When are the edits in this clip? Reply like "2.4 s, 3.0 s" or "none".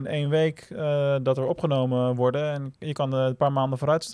none